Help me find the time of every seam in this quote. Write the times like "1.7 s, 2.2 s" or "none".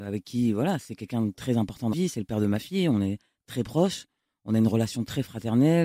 1.9 s